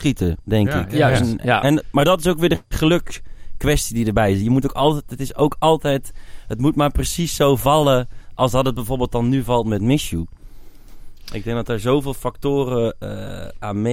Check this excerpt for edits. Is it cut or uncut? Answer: uncut